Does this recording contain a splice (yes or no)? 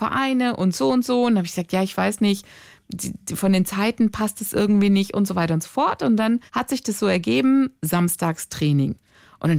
yes